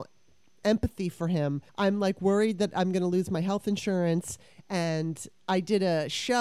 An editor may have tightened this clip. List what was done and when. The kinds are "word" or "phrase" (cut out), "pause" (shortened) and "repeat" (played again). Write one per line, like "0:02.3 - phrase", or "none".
0:01.7 - pause